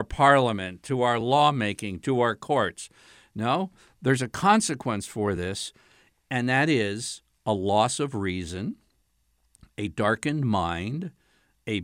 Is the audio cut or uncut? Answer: uncut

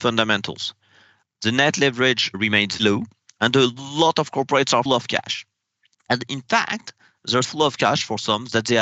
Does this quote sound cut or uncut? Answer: cut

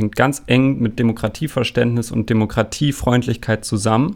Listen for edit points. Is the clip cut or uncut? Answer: uncut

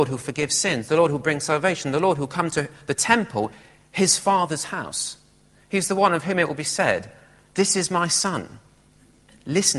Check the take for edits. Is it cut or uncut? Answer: uncut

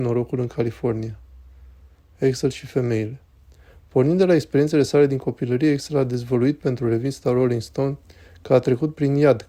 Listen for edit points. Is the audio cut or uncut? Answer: uncut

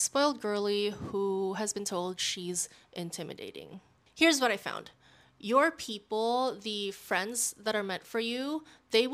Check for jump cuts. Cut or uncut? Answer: uncut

